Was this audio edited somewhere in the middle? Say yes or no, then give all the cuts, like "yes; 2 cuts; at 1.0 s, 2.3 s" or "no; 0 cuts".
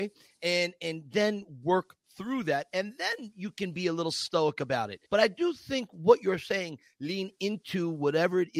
yes; 1 cut; at 5.1 s